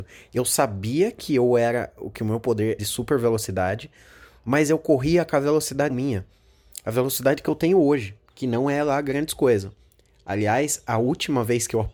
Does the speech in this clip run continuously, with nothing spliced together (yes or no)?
no